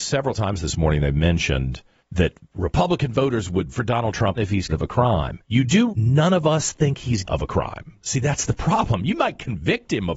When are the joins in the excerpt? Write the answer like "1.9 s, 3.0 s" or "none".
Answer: 2.0 s, 3.7 s, 4.4 s, 4.7 s, 5.4 s, 5.9 s, 7.3 s